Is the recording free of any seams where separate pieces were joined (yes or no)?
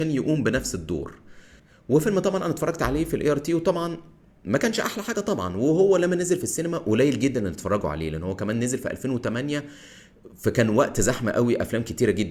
yes